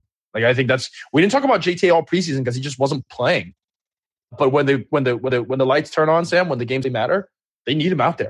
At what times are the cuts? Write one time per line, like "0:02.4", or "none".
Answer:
0:05.3
0:06.8